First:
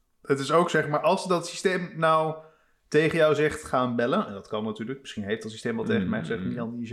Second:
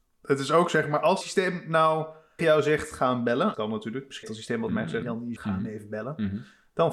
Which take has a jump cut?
second; 7 cuts; at 1.2 s, 2.4 s, 3.5 s, 4.2 s, 4.7 s, 5.0 s, 5.4 s

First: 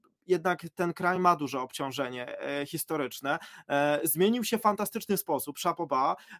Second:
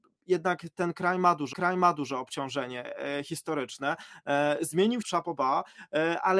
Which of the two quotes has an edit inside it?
second; 2 cuts; at 1.5 s, 5.0 s

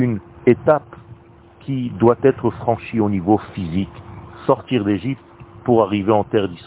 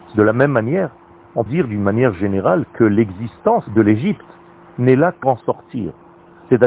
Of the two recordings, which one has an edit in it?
second; 3 cuts; at 1.5 s, 3.7 s, 5.2 s

